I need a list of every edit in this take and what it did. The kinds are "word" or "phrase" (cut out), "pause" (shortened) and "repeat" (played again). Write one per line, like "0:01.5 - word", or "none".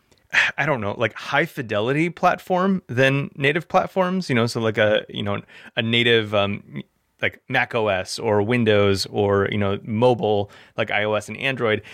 none